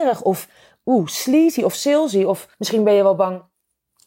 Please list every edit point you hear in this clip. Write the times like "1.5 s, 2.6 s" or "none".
2.5 s